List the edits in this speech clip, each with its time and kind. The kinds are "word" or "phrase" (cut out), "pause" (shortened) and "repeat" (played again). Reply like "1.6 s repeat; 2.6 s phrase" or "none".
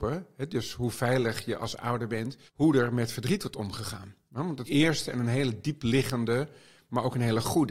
2.5 s pause; 4.7 s phrase